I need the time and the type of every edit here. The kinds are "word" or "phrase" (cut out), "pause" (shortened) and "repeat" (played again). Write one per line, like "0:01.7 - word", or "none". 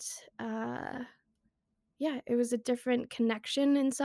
none